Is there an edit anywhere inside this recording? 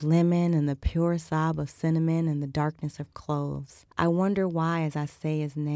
yes; 1 cut; at 3.9 s

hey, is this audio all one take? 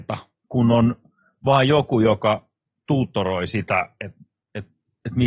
yes; 0 cuts

